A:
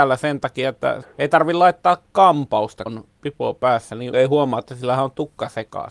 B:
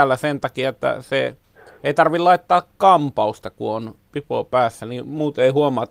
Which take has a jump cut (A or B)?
A